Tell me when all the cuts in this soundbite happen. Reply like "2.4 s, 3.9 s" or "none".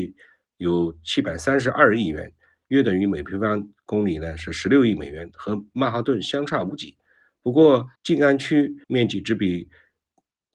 8.0 s, 8.8 s